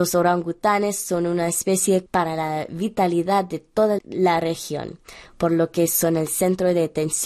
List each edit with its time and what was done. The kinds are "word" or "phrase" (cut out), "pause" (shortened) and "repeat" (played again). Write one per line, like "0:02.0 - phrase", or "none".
0:02.1 - word
0:04.0 - word